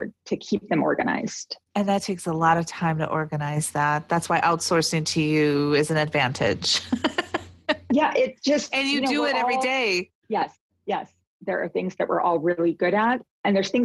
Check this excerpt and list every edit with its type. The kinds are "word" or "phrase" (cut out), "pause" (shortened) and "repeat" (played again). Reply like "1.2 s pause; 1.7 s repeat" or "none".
1.7 s pause